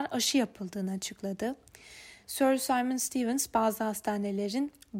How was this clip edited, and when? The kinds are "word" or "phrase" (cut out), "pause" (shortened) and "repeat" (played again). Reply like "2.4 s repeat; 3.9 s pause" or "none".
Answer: none